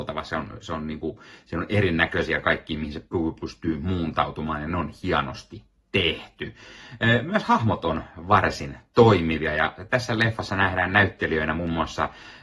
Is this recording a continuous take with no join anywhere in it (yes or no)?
yes